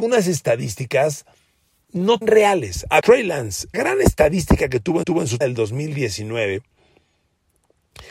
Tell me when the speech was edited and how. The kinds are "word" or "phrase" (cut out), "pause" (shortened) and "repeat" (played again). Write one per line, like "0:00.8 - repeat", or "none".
0:02.2 - word
0:03.0 - word
0:03.7 - word
0:05.0 - repeat
0:05.4 - word